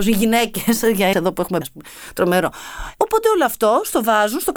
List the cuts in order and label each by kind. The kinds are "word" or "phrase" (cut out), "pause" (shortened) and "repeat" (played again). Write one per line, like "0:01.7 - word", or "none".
0:01.1 - word
0:01.6 - word